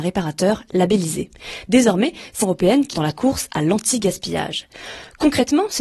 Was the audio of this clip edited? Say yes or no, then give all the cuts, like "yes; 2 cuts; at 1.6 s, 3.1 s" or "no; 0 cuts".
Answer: yes; 2 cuts; at 2.4 s, 2.9 s